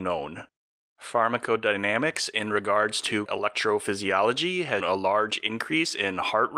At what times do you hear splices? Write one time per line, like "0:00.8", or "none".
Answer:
0:03.3
0:04.8